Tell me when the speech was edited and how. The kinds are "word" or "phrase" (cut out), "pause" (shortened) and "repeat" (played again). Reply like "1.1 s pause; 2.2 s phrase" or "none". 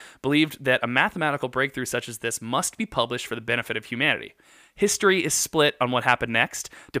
none